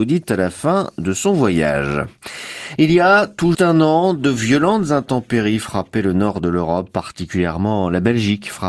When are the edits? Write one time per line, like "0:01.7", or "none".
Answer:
0:03.5